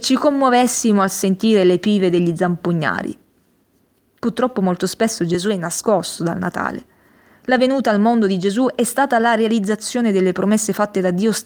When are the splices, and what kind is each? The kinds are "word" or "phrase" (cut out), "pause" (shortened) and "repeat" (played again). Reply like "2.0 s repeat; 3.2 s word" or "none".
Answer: none